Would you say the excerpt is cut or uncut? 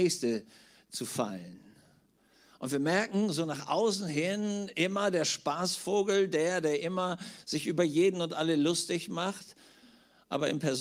uncut